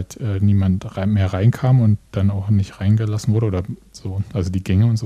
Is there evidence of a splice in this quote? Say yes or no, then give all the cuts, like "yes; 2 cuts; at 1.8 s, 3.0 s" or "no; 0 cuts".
no; 0 cuts